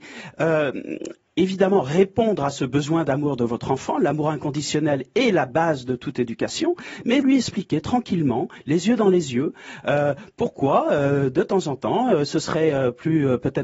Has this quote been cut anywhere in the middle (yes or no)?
yes